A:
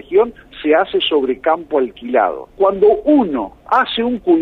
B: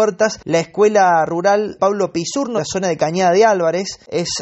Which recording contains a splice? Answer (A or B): B